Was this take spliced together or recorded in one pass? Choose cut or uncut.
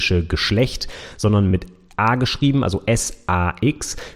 uncut